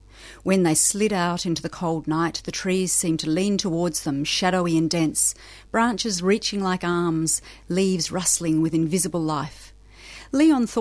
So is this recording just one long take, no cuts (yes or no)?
yes